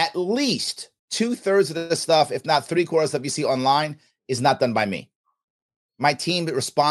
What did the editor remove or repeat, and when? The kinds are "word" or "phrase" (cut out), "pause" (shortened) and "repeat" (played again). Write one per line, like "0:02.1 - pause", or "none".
0:01.0 - pause